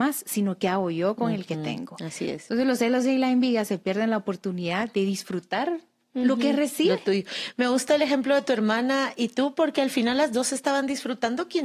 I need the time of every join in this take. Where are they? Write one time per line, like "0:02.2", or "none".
none